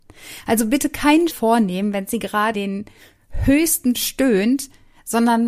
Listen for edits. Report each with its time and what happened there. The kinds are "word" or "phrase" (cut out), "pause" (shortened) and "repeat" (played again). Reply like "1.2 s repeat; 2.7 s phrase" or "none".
1.3 s word; 2.5 s word; 3.9 s word